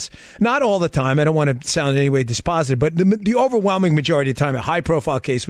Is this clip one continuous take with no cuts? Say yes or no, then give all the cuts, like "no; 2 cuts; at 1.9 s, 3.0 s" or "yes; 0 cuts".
yes; 0 cuts